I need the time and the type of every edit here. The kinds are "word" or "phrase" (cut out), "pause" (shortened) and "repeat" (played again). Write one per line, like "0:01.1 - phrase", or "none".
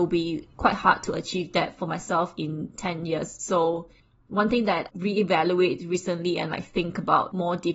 0:04.0 - pause
0:04.9 - phrase